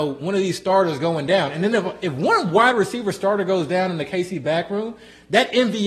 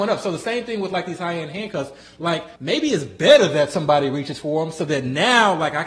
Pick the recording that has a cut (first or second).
second